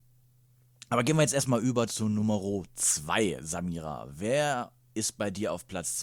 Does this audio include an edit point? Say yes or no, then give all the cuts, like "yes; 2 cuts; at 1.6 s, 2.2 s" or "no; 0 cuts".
no; 0 cuts